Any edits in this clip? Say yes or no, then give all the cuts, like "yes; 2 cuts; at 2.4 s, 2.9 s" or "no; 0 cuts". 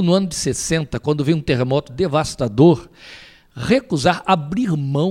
no; 0 cuts